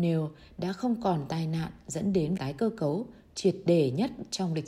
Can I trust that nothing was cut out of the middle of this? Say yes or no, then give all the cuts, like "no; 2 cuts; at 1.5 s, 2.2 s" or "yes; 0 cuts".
no; 1 cut; at 2.4 s